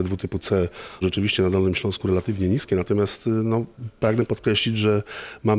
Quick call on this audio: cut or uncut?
cut